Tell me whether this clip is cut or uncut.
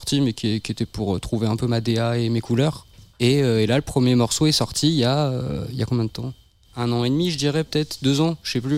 cut